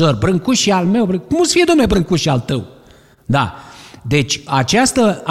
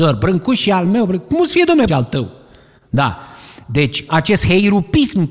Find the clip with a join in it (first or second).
second